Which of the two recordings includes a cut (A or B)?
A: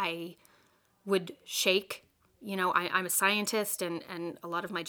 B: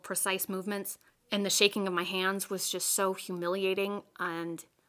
B